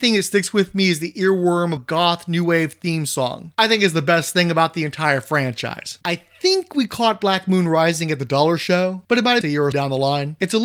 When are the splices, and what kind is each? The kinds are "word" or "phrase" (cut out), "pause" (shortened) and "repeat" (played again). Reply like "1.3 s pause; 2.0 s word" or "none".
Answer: 1.8 s word; 9.4 s phrase; 9.7 s word